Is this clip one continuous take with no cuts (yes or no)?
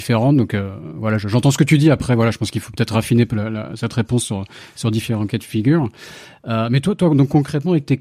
yes